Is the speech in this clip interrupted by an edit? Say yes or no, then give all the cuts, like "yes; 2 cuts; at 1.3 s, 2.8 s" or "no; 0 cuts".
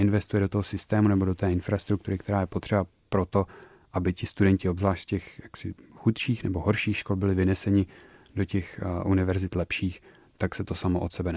no; 0 cuts